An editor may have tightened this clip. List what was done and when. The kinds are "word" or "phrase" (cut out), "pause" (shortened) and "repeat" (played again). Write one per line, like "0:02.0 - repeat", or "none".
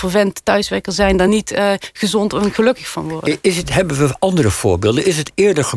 none